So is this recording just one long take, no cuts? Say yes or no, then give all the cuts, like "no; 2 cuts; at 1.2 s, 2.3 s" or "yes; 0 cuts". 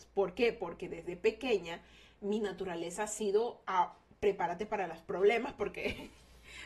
yes; 0 cuts